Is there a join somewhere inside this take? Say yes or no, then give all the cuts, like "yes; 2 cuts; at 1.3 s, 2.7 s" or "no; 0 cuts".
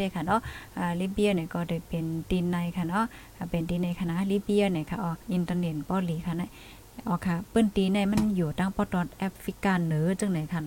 yes; 1 cut; at 5.2 s